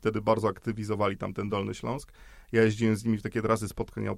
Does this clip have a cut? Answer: no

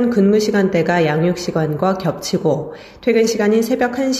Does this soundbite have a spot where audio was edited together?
no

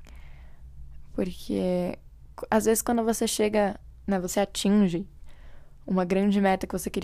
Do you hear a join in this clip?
no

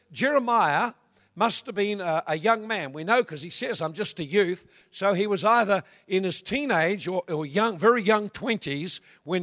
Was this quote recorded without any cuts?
yes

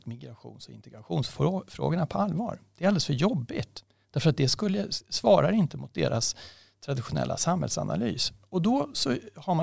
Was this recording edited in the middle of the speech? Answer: no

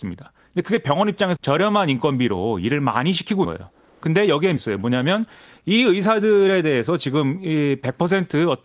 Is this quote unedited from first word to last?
no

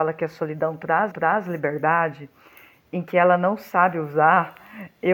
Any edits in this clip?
yes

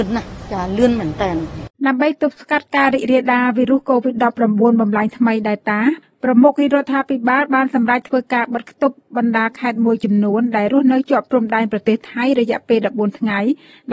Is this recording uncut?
no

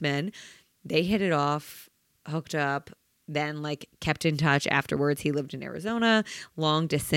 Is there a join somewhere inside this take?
no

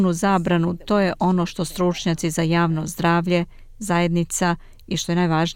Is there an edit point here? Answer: no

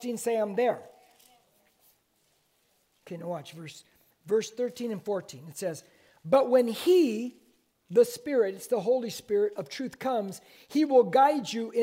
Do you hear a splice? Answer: no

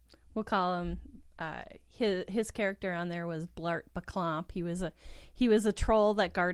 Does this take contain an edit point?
no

